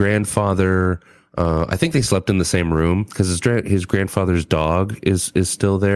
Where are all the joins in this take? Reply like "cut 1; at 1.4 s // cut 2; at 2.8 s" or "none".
none